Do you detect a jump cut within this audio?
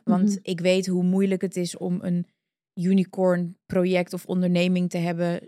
no; 0 cuts

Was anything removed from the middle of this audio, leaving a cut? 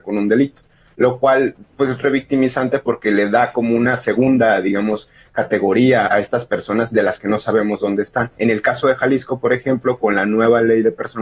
yes; 2 cuts; at 2.0 s, 6.1 s

